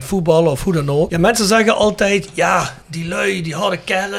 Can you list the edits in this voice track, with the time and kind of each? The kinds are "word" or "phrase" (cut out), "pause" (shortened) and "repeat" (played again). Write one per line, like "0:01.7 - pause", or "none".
0:02.8 - pause